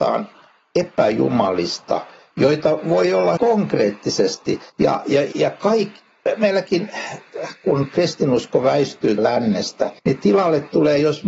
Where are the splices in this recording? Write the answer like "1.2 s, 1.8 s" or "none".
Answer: 3.4 s, 4.7 s, 5.3 s, 9.2 s, 10.0 s